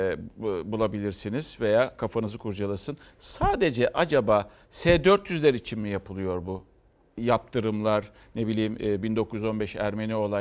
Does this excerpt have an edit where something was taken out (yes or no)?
no